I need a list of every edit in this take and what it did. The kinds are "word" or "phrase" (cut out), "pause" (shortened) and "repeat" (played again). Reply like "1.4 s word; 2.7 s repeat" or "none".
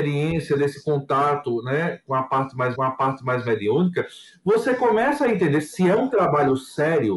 2.7 s repeat